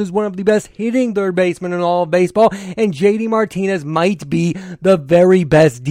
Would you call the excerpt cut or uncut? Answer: uncut